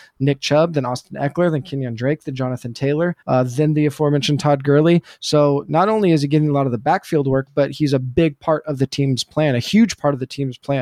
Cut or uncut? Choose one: cut